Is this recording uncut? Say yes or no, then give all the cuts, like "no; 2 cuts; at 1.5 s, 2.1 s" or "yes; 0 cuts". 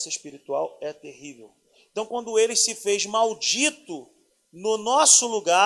yes; 0 cuts